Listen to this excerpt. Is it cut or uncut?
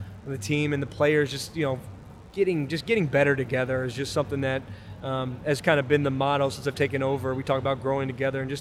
uncut